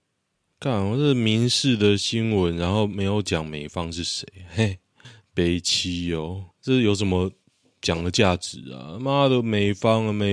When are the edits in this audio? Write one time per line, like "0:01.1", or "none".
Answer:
0:06.5